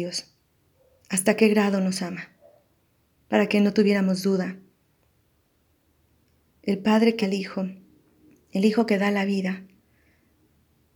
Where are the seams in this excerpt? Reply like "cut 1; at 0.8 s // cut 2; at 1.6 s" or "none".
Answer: cut 1; at 7.2 s

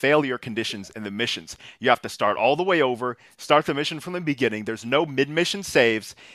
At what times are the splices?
none

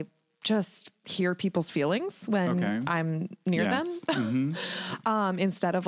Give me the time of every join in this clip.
none

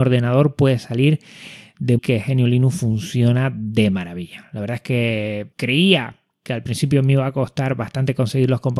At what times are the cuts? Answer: cut 1; at 2.0 s // cut 2; at 5.5 s

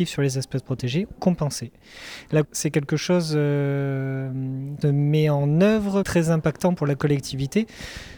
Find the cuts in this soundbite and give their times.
cut 1; at 1.1 s // cut 2; at 2.4 s // cut 3; at 4.8 s // cut 4; at 6.0 s

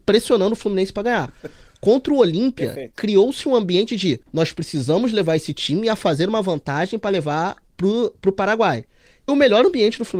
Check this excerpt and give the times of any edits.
cut 1; at 4.2 s // cut 2; at 9.3 s

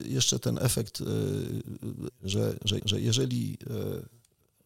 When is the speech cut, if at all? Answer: cut 1; at 2.1 s // cut 2; at 2.8 s

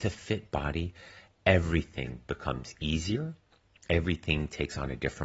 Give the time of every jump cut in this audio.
none

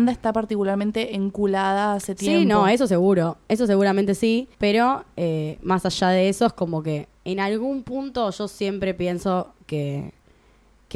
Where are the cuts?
cut 1; at 4.5 s // cut 2; at 7.1 s

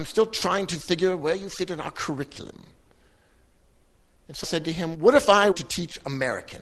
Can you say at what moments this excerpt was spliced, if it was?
cut 1; at 4.4 s // cut 2; at 4.9 s // cut 3; at 5.5 s

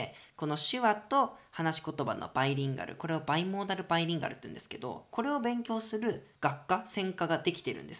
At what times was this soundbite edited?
cut 1; at 6.3 s

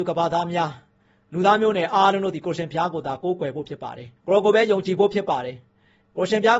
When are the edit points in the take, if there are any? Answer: cut 1; at 4.2 s

